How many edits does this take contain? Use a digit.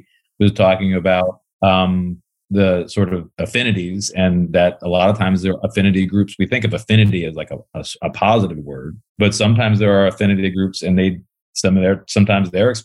3